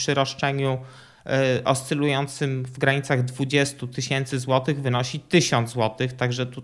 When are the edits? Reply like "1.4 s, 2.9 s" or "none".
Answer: none